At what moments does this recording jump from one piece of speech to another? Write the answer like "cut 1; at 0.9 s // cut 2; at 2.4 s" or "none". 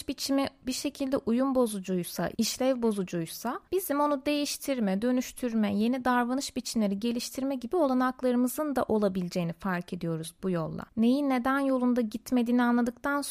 cut 1; at 3.7 s // cut 2; at 10.9 s